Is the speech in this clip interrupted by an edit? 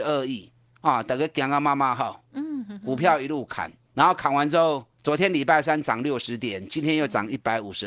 yes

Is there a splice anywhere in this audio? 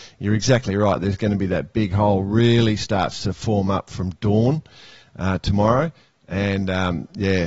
no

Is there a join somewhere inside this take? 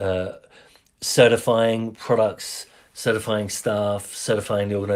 no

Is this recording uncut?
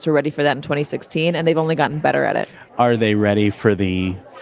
no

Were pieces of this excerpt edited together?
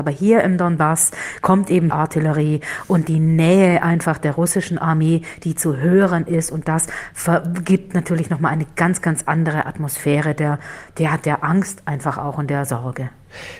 yes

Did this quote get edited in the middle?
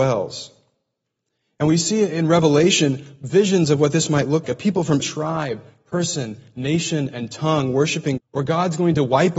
yes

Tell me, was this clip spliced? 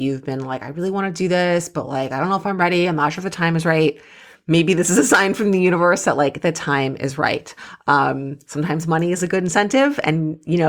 no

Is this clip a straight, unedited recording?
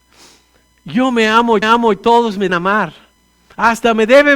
no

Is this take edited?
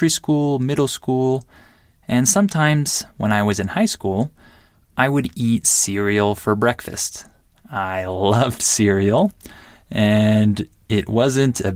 yes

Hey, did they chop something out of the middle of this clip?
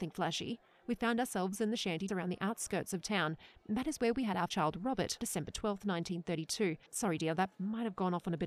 yes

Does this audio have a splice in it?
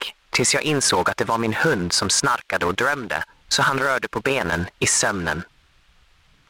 yes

